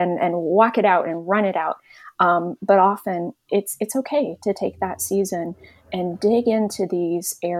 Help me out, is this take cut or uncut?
uncut